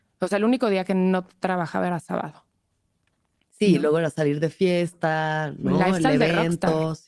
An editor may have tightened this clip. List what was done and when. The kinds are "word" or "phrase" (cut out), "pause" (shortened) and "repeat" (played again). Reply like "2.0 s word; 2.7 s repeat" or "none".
none